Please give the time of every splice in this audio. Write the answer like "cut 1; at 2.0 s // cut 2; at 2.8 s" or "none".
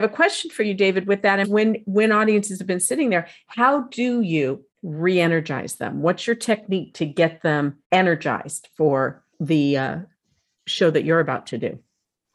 cut 1; at 1.4 s // cut 2; at 4.7 s // cut 3; at 7.8 s // cut 4; at 9.3 s